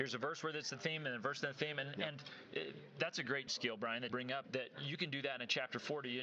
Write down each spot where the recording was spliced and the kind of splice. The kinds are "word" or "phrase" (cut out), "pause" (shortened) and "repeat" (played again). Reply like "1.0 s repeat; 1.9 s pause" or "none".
3.5 s word; 4.1 s word; 4.4 s word